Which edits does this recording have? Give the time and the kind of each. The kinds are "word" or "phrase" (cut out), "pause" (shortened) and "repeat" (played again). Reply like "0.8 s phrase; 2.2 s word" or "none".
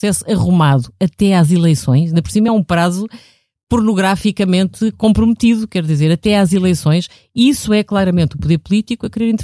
none